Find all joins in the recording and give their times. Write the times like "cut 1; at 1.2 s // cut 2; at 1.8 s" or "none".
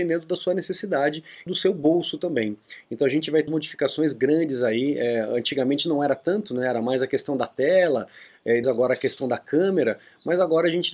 cut 1; at 1.5 s // cut 2; at 3.5 s // cut 3; at 8.6 s